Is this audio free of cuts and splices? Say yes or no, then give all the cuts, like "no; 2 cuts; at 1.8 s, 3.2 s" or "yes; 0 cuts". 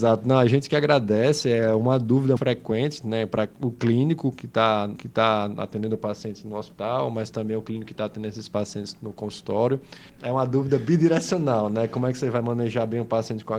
no; 2 cuts; at 2.4 s, 5.0 s